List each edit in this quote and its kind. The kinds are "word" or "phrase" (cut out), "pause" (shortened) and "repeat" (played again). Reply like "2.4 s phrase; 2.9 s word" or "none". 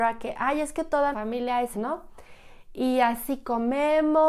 1.1 s word; 1.7 s phrase